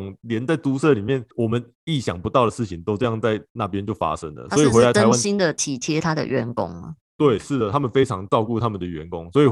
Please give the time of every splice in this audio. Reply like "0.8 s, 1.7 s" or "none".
1.3 s, 7.0 s